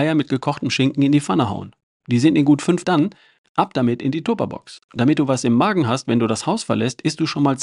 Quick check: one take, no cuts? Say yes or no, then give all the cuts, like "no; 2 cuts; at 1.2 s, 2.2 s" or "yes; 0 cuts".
no; 2 cuts; at 2.8 s, 4.8 s